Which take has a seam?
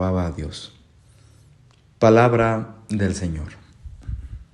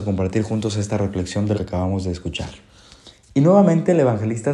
second; 1 cut; at 1.5 s

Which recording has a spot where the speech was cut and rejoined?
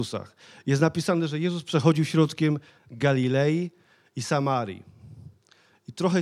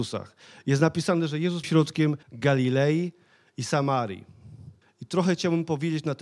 second; 3 cuts; at 1.6 s, 2.2 s, 4.8 s

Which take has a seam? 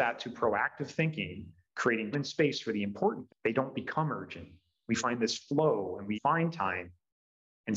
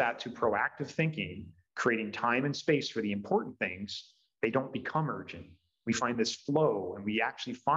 first; 3 cuts; at 2.1 s, 3.3 s, 6.1 s

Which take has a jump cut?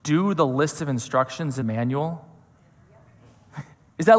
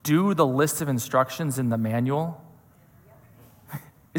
first; 1 cut; at 1.6 s

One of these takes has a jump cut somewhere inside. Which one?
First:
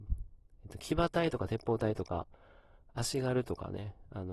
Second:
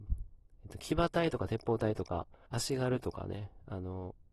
second; 1 cut; at 2.5 s

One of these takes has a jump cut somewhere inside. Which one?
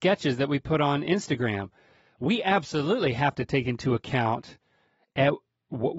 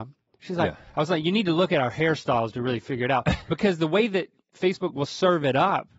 second; 1 cut; at 4.4 s

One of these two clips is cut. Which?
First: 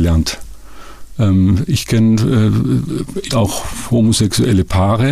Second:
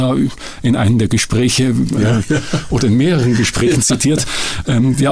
first; 1 cut; at 3.3 s

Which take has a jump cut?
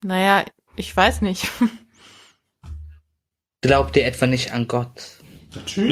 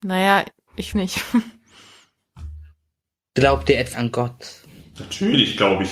second; 2 cuts; at 0.9 s, 3.9 s

